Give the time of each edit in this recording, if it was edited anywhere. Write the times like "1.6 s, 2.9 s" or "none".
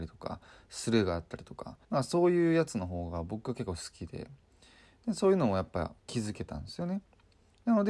1.8 s, 6.0 s